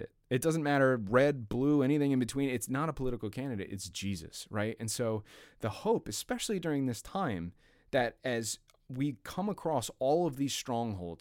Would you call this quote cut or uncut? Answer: uncut